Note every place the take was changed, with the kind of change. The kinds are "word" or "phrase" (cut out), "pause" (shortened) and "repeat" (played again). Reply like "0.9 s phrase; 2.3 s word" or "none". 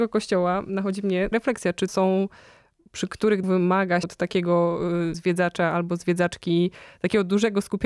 1.3 s word; 1.9 s word; 2.9 s word; 3.4 s word; 4.0 s word; 5.1 s word